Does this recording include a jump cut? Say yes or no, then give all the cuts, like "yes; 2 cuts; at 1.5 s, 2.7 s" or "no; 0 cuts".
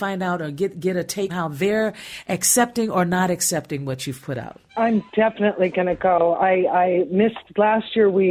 yes; 2 cuts; at 1.3 s, 4.7 s